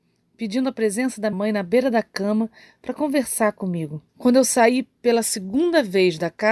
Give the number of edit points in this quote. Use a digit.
2